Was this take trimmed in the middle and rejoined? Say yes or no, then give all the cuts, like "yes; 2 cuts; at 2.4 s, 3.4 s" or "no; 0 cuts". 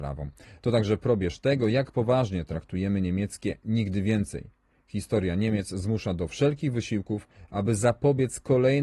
no; 0 cuts